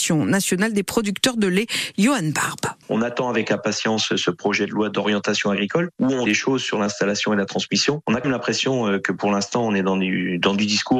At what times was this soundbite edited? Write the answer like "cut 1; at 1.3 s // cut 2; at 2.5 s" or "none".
cut 1; at 2.8 s // cut 2; at 6.3 s // cut 3; at 8.2 s